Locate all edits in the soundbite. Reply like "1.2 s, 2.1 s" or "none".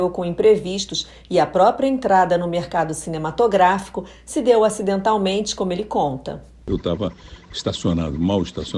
none